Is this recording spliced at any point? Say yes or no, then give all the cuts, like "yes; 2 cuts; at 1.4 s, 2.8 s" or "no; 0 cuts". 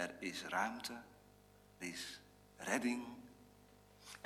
yes; 1 cut; at 1.8 s